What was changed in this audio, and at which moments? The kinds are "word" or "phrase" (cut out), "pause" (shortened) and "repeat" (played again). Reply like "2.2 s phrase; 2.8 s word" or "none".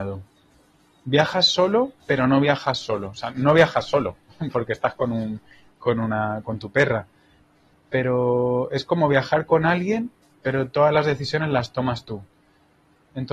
10.2 s pause